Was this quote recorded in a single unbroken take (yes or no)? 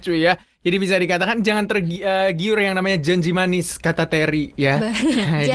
yes